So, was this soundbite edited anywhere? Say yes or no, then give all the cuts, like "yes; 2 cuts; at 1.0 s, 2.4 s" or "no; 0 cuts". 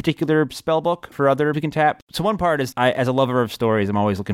yes; 3 cuts; at 1.1 s, 1.5 s, 2.7 s